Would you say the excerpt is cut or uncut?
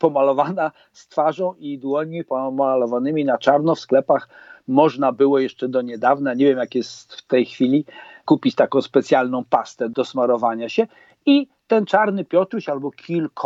uncut